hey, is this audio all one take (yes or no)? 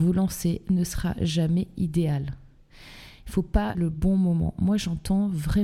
no